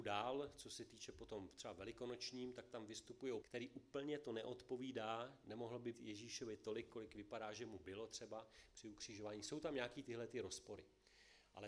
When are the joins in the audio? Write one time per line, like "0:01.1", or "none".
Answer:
0:03.4
0:05.9